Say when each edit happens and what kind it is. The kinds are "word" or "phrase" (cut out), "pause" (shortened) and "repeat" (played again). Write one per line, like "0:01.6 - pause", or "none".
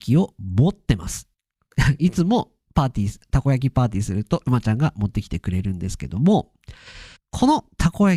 0:01.3 - pause
0:07.2 - pause